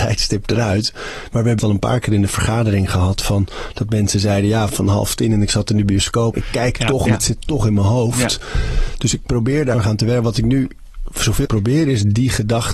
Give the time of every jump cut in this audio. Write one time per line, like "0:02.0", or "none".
0:01.6
0:04.7
0:06.3
0:07.0
0:09.7
0:11.4